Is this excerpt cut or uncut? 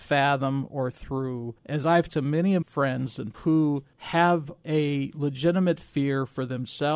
cut